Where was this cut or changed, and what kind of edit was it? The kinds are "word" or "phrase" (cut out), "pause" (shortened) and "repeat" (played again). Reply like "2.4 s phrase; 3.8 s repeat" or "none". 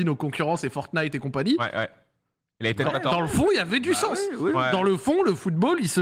none

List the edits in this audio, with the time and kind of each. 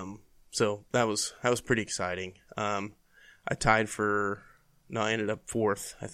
none

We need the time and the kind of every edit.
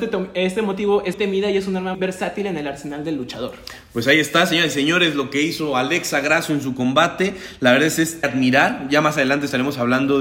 1.1 s word; 1.9 s word; 8.2 s word

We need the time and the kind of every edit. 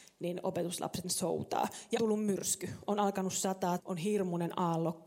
1.0 s word; 2.0 s word; 3.8 s word

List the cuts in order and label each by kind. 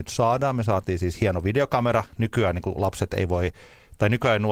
none

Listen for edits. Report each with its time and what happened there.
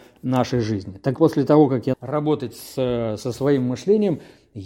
1.2 s word; 1.9 s word

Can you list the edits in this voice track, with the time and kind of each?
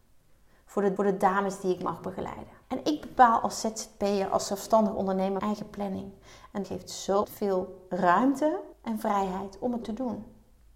1.0 s repeat; 2.6 s pause; 5.4 s word; 6.6 s word; 7.2 s word; 8.7 s pause; 9.8 s word

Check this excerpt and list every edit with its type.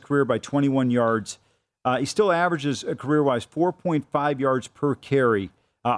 none

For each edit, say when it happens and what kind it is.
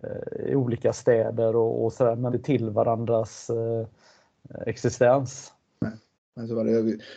2.3 s phrase; 6.1 s pause

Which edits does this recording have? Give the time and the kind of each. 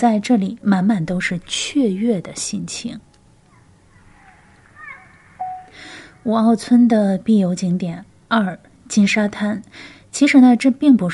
none

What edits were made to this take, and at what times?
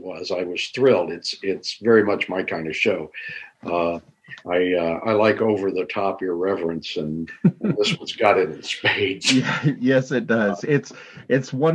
4.4 s pause; 7.3 s word

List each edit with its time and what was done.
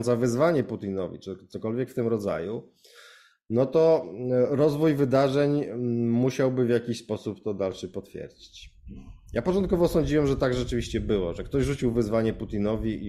none

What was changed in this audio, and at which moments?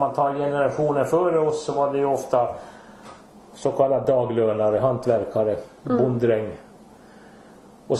none

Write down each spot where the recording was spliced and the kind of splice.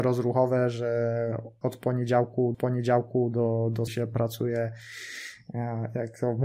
1.6 s word; 2.5 s repeat; 3.9 s word

